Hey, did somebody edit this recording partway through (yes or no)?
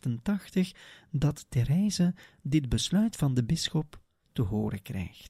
no